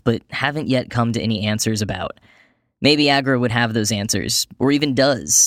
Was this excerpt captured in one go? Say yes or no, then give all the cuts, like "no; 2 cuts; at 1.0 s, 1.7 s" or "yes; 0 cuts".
yes; 0 cuts